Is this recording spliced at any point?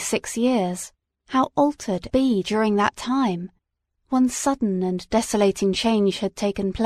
yes; 3 cuts; at 1.0 s, 2.1 s, 3.7 s

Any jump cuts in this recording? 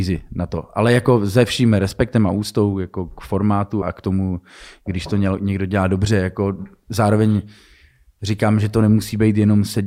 yes; 1 cut; at 3.8 s

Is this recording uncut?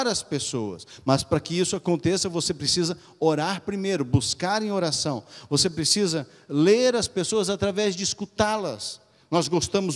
yes; 0 cuts

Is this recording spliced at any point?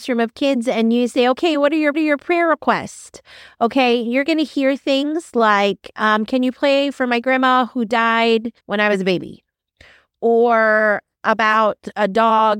yes; 2 cuts; at 1.9 s, 8.6 s

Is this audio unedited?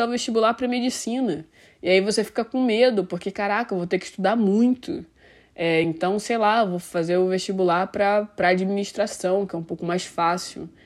yes; 0 cuts

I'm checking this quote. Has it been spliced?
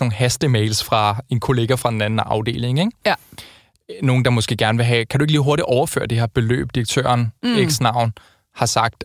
yes; 1 cut; at 7.4 s

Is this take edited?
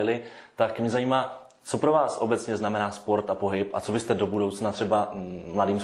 no; 0 cuts

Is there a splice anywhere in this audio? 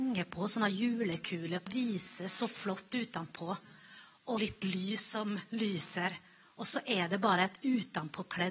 yes; 2 cuts; at 1.7 s, 4.4 s

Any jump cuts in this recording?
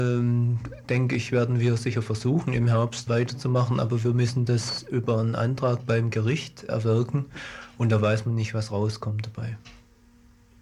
yes; 2 cuts; at 3.1 s, 6.7 s

